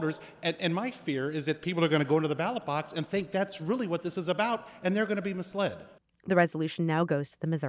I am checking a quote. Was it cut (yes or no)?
no